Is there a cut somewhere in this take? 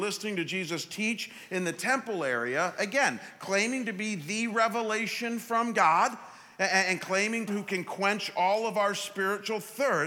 yes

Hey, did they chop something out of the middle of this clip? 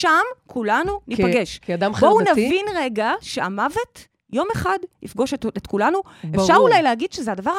no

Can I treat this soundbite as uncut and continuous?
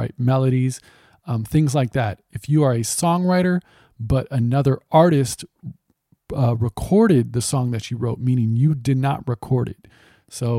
yes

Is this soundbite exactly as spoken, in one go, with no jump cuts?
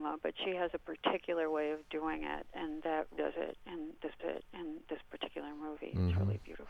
no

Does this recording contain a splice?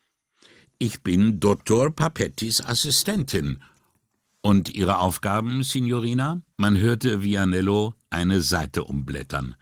yes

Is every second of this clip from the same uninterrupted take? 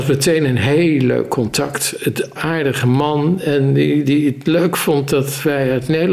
no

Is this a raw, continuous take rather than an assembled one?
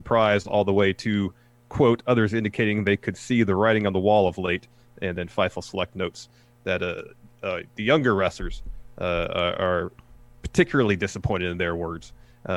yes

